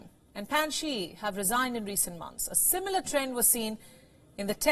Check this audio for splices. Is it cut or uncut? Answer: uncut